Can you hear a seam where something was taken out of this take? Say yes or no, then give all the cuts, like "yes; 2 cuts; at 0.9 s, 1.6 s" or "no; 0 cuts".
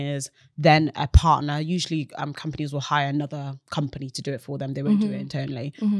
no; 0 cuts